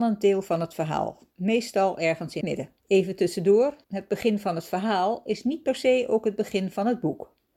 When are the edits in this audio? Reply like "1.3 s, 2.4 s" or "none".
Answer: 1.3 s, 2.4 s, 2.8 s, 3.8 s